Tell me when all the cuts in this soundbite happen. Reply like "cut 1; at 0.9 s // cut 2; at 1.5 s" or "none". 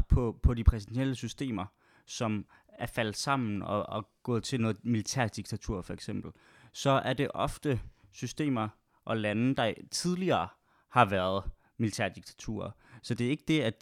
none